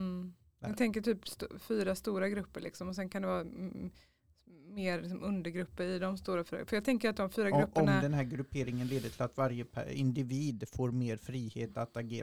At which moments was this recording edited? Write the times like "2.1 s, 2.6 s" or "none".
none